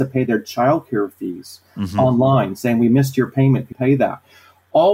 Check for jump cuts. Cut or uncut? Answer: cut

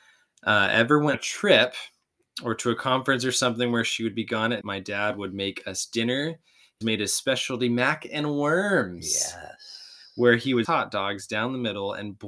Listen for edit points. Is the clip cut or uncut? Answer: cut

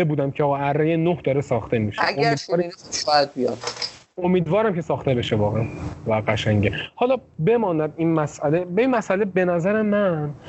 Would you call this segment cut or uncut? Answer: uncut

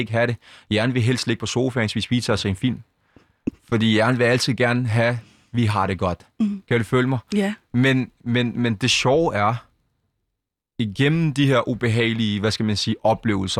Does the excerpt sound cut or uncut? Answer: uncut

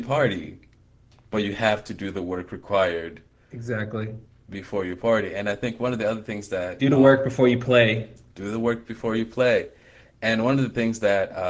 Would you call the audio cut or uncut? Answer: uncut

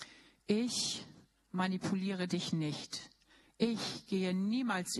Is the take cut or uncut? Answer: uncut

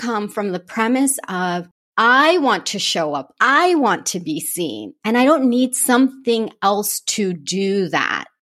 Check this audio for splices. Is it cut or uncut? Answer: uncut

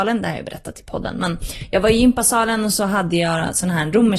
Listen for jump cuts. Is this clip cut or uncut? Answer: uncut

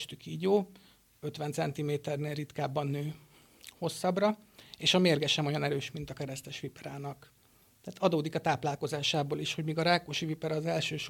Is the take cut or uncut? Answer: uncut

